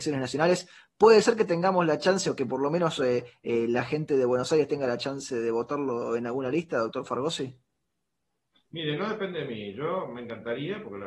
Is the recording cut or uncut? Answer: uncut